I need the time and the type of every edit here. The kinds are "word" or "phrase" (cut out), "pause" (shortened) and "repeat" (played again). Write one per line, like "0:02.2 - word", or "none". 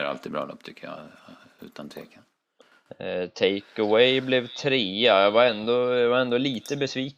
none